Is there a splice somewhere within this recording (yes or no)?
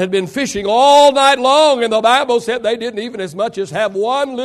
no